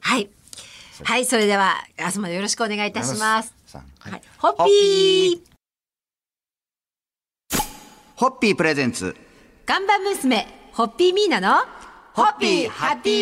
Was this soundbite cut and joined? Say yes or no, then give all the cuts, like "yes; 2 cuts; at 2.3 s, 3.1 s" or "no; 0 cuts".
no; 0 cuts